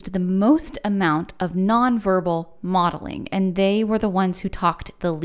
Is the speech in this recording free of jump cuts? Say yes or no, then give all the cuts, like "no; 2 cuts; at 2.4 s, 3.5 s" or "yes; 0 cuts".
yes; 0 cuts